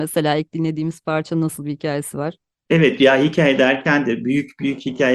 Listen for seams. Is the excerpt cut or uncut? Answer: uncut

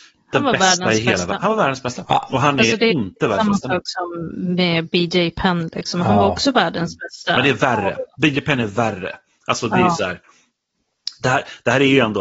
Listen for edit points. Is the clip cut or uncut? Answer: uncut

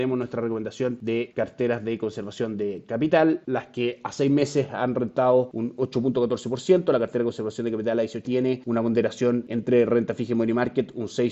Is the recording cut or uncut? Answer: cut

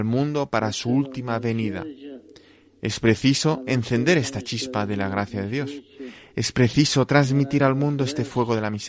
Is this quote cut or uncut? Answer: uncut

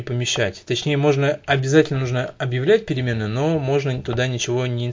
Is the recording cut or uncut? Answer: uncut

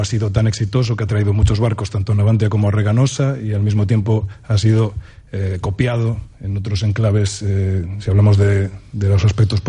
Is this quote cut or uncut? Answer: uncut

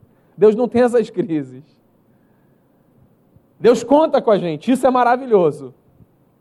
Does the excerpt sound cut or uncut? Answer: uncut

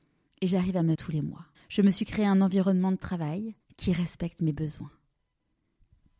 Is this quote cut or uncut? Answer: cut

